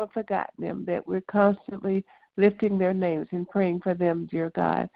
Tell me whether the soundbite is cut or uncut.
uncut